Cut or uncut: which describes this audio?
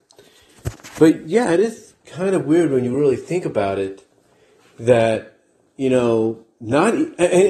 uncut